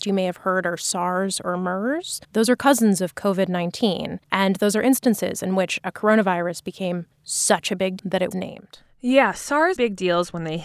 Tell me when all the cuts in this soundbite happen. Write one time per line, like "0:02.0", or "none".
0:02.2
0:04.2
0:07.1
0:08.0
0:08.3
0:09.8

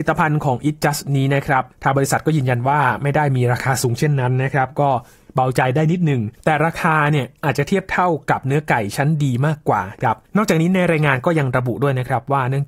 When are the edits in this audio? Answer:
0:01.7
0:06.3
0:10.3

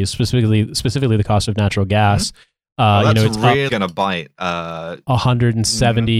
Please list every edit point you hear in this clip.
0:03.7

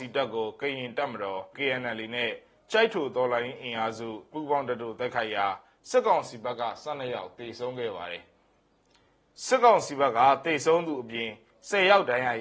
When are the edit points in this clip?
0:01.5
0:04.3

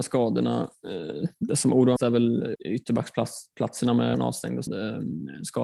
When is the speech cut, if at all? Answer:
0:02.0
0:02.6
0:04.1
0:04.7

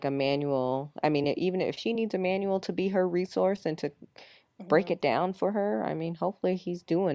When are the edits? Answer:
none

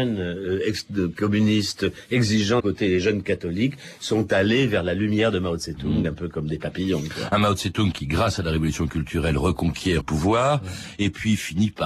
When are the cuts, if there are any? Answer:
0:02.6
0:10.0

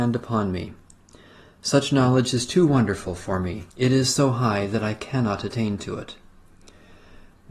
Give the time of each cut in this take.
0:03.7

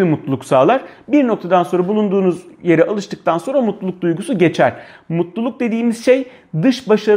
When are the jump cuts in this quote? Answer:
none

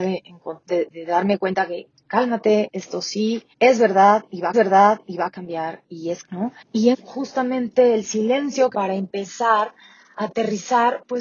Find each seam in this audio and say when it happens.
0:00.9
0:03.5
0:04.5
0:06.2
0:06.6
0:06.9
0:08.7

